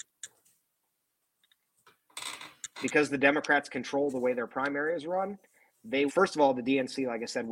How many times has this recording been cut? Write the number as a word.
one